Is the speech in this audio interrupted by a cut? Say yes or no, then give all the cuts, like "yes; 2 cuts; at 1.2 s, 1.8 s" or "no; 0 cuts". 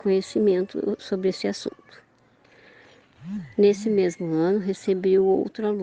no; 0 cuts